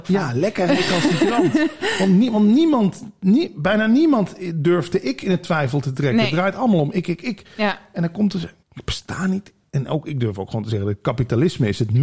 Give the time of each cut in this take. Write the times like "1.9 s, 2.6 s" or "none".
8.6 s